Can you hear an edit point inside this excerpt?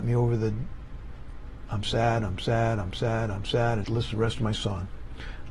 yes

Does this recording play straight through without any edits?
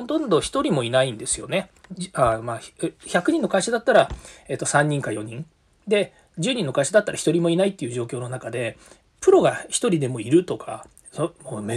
yes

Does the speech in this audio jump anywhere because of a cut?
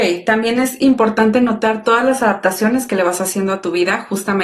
no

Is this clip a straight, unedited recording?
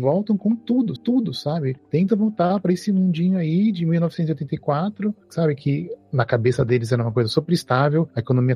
no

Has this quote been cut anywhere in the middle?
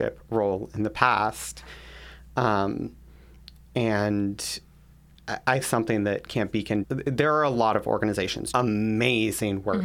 yes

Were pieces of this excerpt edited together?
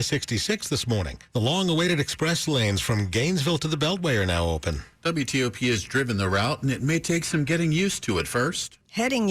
yes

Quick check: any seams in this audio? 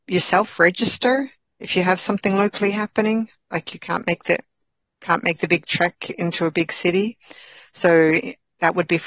no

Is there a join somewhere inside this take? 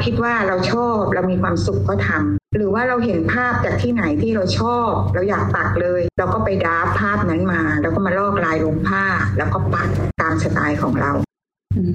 yes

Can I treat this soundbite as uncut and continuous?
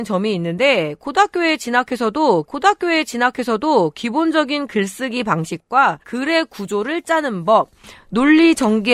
no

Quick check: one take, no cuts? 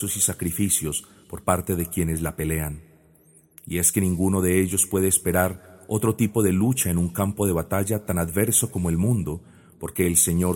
yes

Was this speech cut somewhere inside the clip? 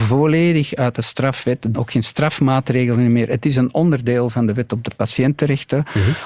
yes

